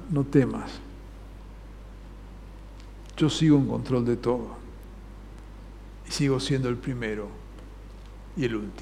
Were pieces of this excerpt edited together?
no; 0 cuts

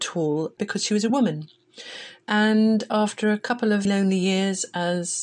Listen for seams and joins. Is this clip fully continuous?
no; 1 cut; at 3.8 s

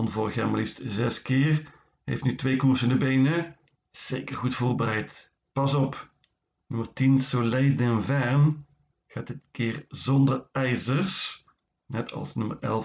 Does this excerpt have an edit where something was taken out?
no; 0 cuts

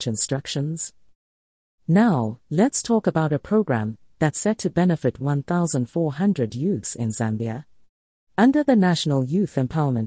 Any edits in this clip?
no; 0 cuts

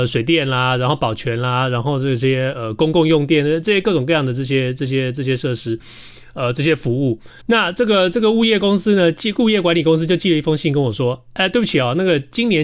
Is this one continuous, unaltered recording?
no; 1 cut; at 7.4 s

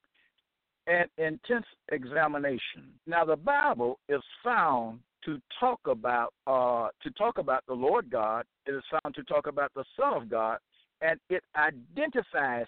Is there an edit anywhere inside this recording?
yes; 3 cuts; at 3.0 s, 6.4 s, 8.6 s

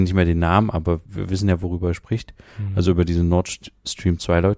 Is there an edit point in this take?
yes; 1 cut; at 1.1 s

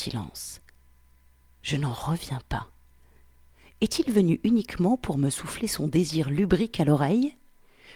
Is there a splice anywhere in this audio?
no; 0 cuts

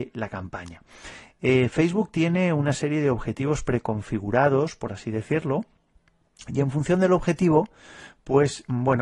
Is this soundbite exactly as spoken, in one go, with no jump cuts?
yes; 0 cuts

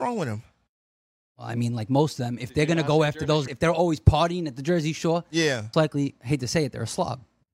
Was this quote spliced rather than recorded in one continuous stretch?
yes; 2 cuts; at 3.5 s, 5.7 s

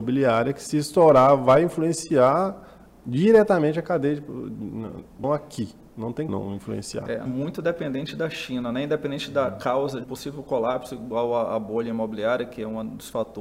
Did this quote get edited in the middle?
yes; 4 cuts; at 5.2 s, 6.3 s, 7.3 s, 10.0 s

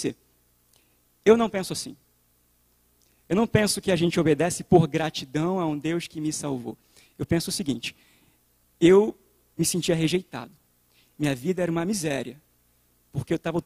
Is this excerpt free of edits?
yes; 0 cuts

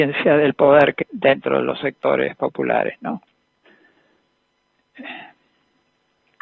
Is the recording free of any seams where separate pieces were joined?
no; 1 cut; at 1.0 s

